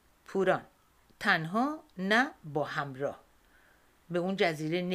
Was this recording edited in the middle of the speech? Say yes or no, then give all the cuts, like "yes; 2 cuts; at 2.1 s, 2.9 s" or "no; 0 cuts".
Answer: yes; 1 cut; at 1.1 s